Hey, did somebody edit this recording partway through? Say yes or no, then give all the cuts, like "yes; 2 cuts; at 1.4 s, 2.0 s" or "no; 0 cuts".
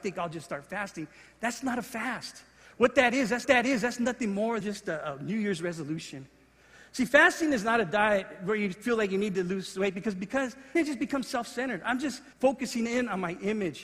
yes; 4 cuts; at 3.4 s, 4.6 s, 10.8 s, 12.3 s